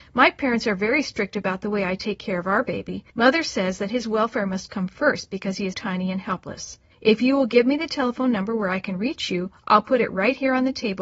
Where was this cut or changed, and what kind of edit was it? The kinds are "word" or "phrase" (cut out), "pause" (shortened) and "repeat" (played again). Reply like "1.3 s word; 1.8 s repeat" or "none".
3.1 s pause; 5.7 s word; 6.9 s pause